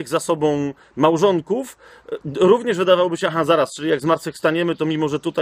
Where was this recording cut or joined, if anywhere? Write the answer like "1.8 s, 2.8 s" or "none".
none